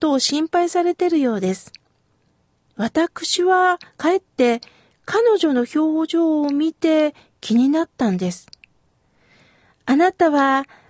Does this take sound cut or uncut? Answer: uncut